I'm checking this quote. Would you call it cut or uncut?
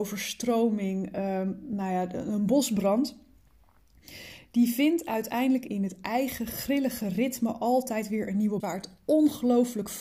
cut